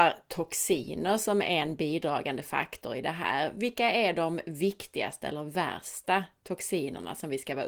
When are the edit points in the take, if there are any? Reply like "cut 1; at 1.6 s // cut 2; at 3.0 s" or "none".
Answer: none